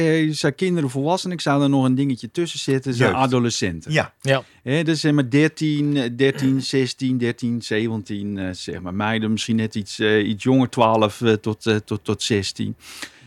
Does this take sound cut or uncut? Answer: uncut